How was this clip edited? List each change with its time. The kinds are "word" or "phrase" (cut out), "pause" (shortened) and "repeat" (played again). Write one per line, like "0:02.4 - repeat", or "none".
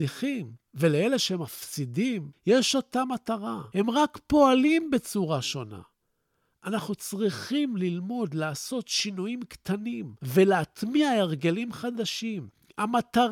none